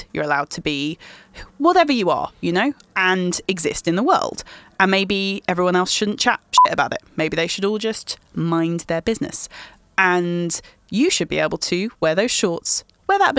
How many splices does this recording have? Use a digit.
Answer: 0